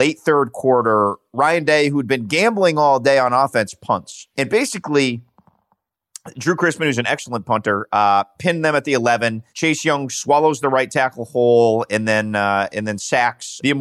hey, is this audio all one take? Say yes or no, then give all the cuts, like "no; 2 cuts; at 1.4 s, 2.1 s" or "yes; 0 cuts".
no; 2 cuts; at 4.3 s, 9.5 s